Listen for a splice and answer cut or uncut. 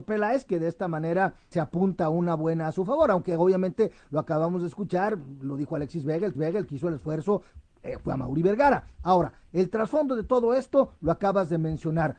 cut